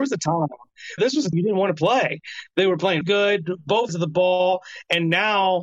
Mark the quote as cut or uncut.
cut